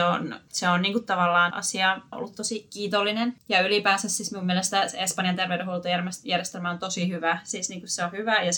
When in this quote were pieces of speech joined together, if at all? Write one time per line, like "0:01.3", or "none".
0:01.5
0:02.1